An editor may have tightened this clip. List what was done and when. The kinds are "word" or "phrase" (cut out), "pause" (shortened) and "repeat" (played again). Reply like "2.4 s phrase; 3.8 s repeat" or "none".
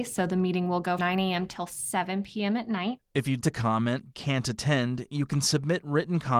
1.0 s word; 3.4 s word; 4.1 s word